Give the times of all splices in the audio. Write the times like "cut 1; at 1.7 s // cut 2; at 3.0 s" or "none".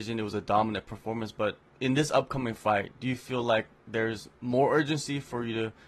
cut 1; at 1.7 s